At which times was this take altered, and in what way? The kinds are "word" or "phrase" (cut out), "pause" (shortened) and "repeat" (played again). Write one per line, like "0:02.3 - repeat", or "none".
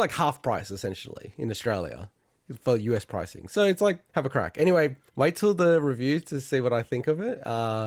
0:04.1 - pause
0:05.1 - pause

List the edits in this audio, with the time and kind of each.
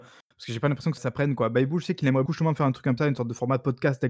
0:01.0 - word
0:02.3 - word
0:03.0 - word

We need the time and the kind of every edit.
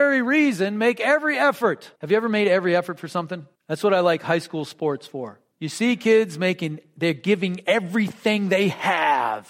0:02.0 - pause
0:03.5 - pause
0:05.5 - pause

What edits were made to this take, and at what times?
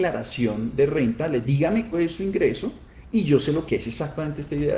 0:01.4 - word
0:01.9 - word
0:03.7 - word

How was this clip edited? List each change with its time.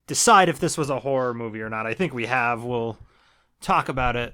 none

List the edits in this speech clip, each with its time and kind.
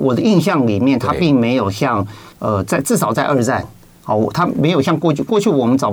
0:02.3 - pause

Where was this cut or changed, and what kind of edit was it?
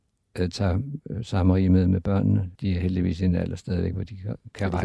0:02.6 - pause

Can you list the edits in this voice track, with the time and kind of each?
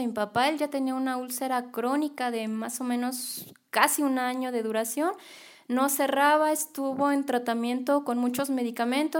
none

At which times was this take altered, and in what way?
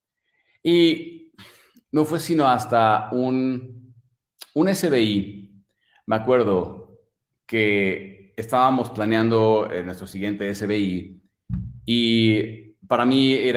none

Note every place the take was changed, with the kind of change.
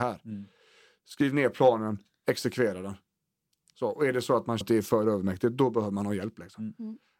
0:04.6 - word

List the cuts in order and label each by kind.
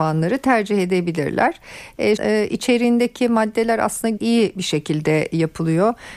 0:02.2 - word
0:04.2 - phrase

